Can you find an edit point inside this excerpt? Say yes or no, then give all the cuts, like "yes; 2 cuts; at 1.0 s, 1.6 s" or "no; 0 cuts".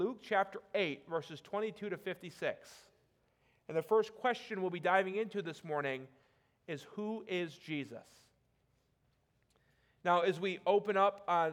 no; 0 cuts